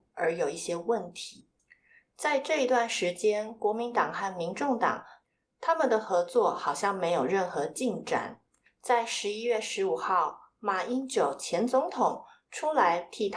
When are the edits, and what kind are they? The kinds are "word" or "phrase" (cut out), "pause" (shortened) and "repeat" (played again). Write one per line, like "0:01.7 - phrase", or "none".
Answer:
none